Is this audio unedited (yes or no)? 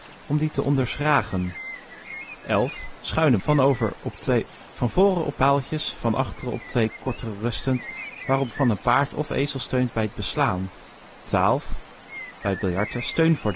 no